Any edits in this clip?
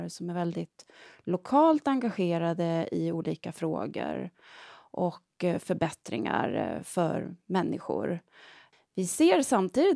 no; 0 cuts

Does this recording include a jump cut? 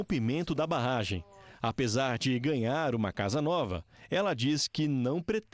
no; 0 cuts

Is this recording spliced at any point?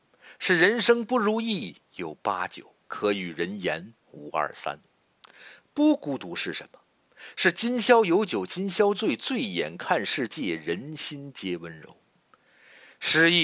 yes; 3 cuts; at 1.8 s, 2.8 s, 4.0 s

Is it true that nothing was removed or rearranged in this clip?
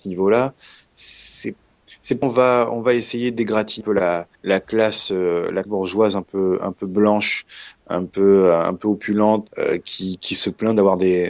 no; 5 cuts; at 2.2 s, 3.8 s, 4.4 s, 5.7 s, 9.5 s

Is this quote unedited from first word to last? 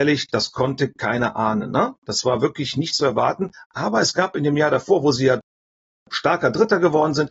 yes; 0 cuts

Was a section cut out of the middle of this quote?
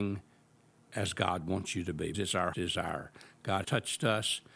yes; 3 cuts; at 2.1 s, 2.5 s, 3.6 s

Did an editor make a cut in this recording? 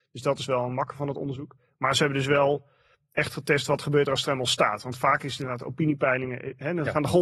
no; 0 cuts

